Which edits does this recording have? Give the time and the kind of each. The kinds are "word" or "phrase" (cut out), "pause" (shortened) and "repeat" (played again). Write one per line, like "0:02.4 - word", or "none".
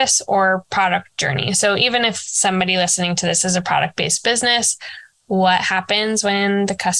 none